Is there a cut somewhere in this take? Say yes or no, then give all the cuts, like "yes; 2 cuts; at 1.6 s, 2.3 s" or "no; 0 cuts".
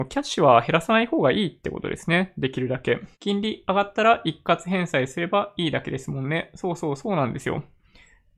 yes; 1 cut; at 3.1 s